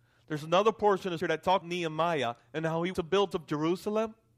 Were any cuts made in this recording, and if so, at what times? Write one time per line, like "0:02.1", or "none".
0:01.2
0:01.6
0:02.9
0:03.3